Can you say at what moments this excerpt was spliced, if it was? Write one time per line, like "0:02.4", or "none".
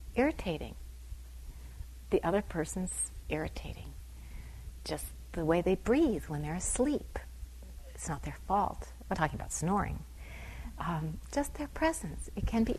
0:03.2
0:09.1